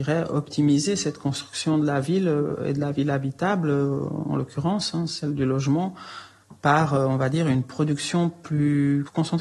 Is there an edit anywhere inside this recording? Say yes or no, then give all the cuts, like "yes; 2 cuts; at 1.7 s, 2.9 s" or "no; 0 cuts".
no; 0 cuts